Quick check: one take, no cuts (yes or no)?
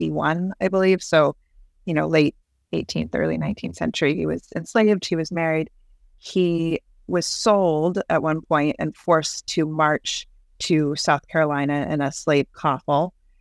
yes